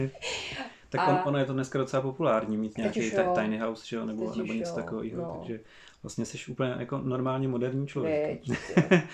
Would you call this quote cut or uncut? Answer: uncut